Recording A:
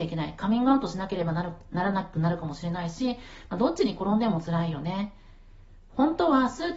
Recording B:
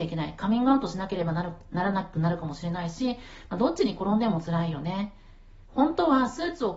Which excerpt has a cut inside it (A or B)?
B